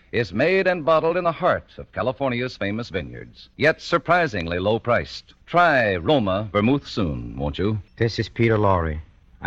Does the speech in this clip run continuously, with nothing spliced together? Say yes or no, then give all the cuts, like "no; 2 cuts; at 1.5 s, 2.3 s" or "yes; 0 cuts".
no; 3 cuts; at 3.5 s, 5.4 s, 7.9 s